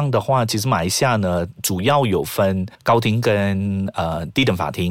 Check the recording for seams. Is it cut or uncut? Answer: cut